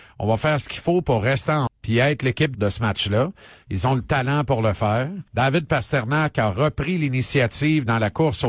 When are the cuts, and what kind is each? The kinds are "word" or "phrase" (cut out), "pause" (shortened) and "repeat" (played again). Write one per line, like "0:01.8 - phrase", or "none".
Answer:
0:01.7 - word
0:02.5 - word
0:05.3 - pause